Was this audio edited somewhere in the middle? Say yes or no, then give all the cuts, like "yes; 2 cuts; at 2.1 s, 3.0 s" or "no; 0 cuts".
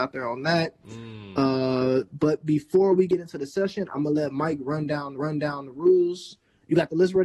yes; 1 cut; at 5.2 s